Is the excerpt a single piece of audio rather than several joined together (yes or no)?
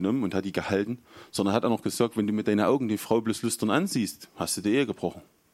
yes